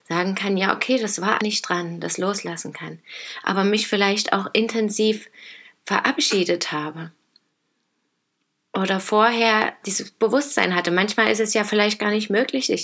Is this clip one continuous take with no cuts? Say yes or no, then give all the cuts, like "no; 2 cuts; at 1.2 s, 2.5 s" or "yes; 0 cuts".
no; 2 cuts; at 1.4 s, 9.8 s